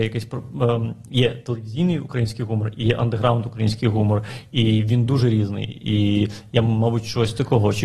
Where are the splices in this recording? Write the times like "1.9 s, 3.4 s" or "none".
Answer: none